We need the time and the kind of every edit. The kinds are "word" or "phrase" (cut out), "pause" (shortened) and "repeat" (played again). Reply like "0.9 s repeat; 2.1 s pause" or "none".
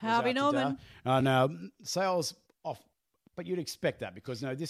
none

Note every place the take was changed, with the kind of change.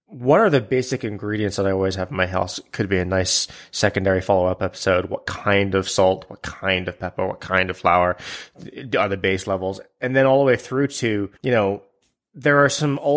11.4 s pause

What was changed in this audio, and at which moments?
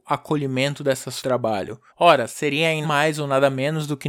1.2 s phrase; 1.9 s pause; 2.8 s word

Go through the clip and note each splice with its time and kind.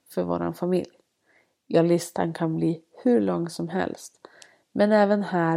none

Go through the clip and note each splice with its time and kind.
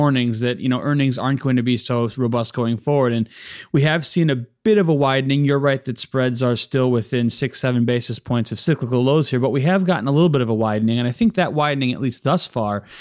none

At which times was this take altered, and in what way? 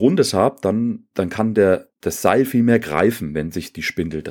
1.1 s pause; 2.0 s pause

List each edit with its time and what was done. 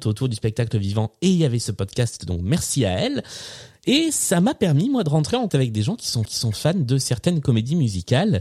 5.5 s word; 6.3 s repeat

